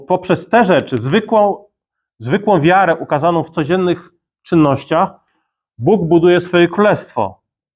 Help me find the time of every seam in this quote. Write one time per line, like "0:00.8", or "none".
none

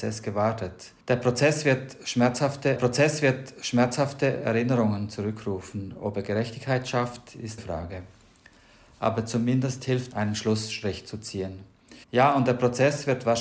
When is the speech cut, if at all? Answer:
0:01.0
0:02.8
0:07.6
0:10.1
0:12.0

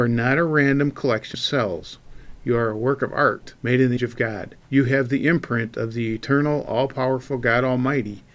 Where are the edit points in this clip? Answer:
0:01.3
0:03.6
0:04.0
0:04.6

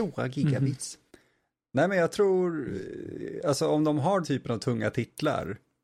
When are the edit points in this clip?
0:04.2

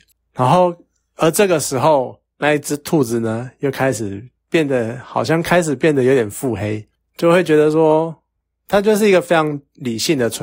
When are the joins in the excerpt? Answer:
none

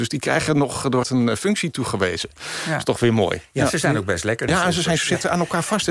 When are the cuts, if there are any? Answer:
0:01.0
0:04.5

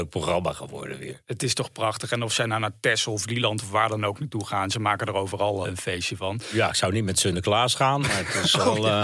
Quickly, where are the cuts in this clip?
0:05.6

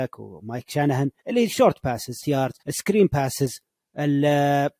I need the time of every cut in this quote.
0:01.2
0:02.2
0:02.6

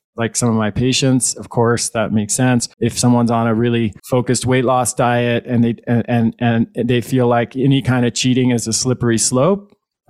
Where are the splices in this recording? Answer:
0:02.7
0:04.0

